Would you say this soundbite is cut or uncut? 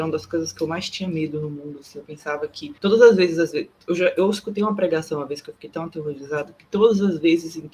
cut